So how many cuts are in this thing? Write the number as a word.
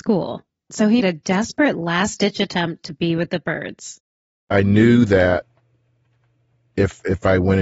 one